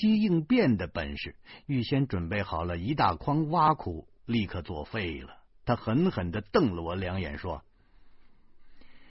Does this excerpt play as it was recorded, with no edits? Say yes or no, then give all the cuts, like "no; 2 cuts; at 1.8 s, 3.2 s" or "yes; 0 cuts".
no; 1 cut; at 5.5 s